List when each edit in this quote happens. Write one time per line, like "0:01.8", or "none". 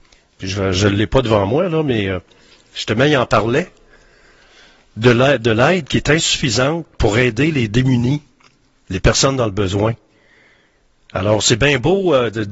none